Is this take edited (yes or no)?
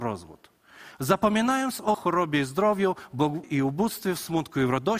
yes